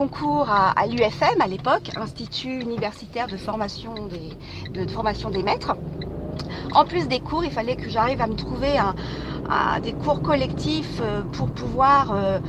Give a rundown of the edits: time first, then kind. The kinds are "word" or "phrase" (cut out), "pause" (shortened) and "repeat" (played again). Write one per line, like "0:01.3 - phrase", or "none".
none

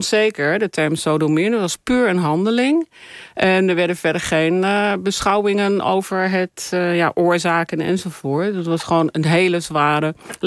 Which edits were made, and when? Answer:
none

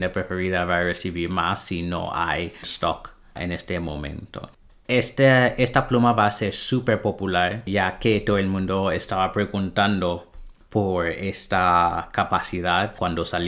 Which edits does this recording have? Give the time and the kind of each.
0:02.6 - word

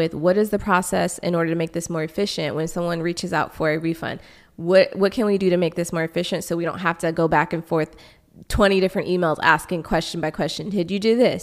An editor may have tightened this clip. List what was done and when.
none

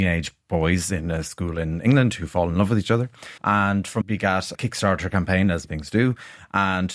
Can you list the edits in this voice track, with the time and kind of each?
0:03.4 - pause
0:04.0 - word
0:04.5 - phrase
0:05.6 - word

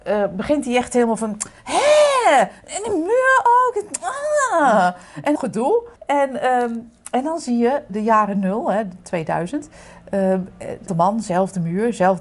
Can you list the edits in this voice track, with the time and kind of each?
0:05.4 - word
0:06.0 - pause
0:07.9 - word
0:10.9 - word

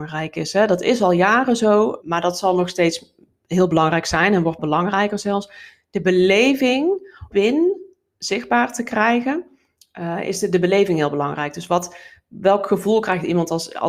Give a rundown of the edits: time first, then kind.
0:02.0 - word
0:04.6 - phrase
0:07.3 - phrase

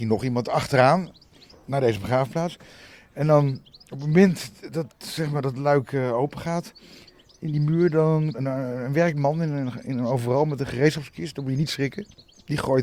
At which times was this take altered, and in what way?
0:08.3 - phrase

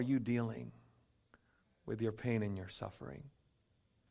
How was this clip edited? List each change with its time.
none

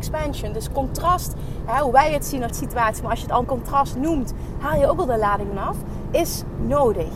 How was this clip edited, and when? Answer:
0:02.5 - word
0:03.4 - word
0:05.5 - word

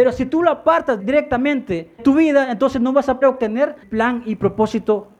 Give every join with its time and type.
0:01.0 - word
0:02.0 - word
0:03.2 - word
0:03.8 - word

